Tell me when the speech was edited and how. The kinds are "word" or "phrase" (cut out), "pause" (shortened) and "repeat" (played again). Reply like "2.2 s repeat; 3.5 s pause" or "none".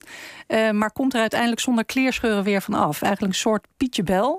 none